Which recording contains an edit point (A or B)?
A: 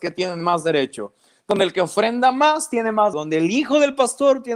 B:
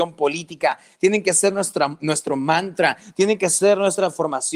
A